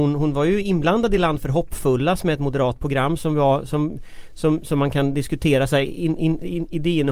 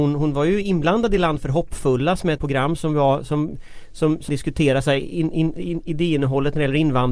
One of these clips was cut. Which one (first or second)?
second